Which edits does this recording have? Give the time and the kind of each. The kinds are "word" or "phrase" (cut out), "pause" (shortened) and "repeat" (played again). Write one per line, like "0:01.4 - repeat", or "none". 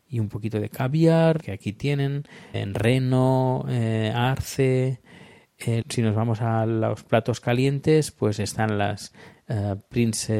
0:01.4 - phrase
0:02.5 - word
0:05.8 - phrase